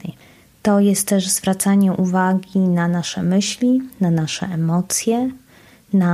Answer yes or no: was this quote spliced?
no